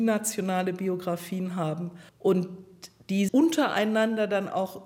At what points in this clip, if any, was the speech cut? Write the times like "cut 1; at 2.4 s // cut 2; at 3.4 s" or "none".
cut 1; at 2.1 s // cut 2; at 3.3 s